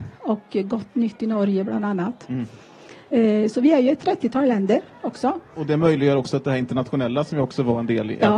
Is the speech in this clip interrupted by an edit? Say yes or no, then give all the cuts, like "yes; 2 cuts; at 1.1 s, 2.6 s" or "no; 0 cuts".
no; 0 cuts